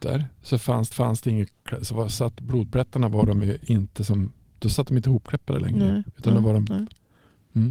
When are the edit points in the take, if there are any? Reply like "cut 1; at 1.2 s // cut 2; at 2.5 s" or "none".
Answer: cut 1; at 0.9 s